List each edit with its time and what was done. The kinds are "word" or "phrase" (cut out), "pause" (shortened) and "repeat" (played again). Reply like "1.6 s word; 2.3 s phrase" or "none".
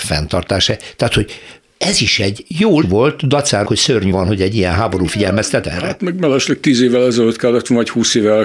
2.8 s word; 3.6 s word; 4.1 s word; 5.6 s word